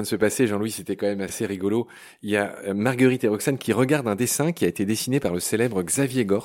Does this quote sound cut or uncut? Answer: uncut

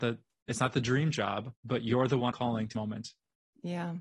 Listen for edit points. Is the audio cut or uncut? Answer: cut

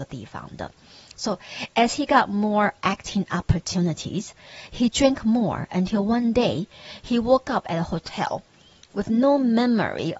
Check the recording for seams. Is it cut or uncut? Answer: uncut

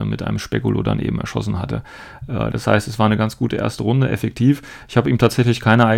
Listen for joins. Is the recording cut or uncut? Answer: uncut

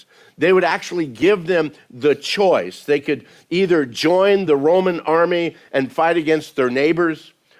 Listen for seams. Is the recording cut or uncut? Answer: uncut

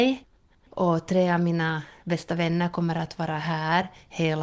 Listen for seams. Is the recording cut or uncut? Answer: uncut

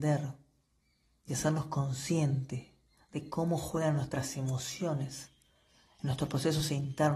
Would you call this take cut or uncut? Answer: uncut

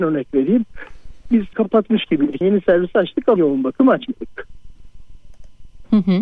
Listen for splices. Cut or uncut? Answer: cut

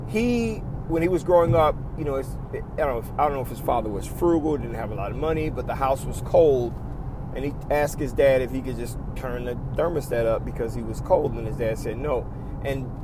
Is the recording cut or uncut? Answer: uncut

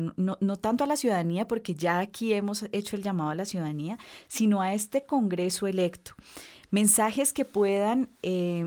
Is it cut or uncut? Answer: uncut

